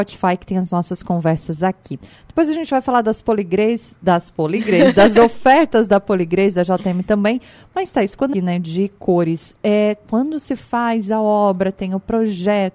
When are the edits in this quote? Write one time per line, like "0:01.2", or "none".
0:08.3